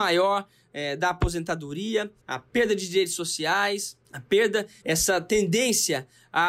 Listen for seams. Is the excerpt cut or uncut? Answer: cut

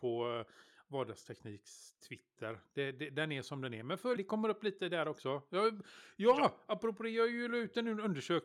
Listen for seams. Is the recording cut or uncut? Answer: cut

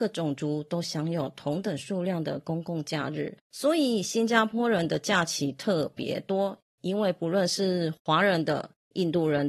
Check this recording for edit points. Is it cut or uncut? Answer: cut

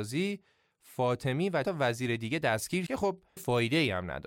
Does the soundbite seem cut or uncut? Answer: cut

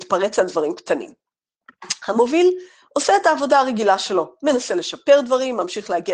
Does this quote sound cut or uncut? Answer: uncut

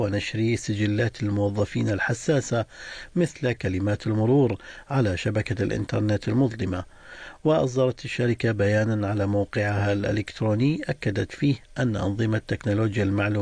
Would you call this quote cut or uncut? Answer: uncut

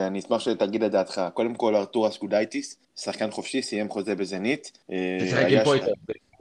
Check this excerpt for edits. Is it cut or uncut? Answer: cut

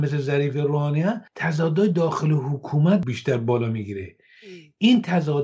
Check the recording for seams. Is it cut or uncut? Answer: cut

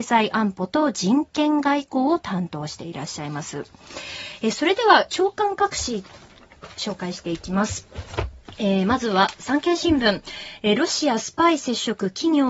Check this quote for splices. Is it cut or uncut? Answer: cut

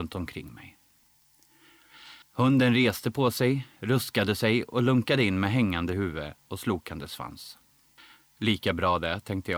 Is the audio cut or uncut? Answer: cut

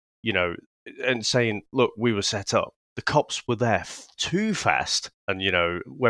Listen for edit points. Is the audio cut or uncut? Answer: cut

